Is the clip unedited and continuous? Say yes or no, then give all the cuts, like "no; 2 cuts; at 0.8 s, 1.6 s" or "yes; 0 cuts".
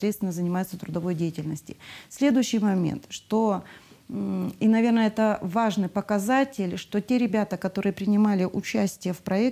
yes; 0 cuts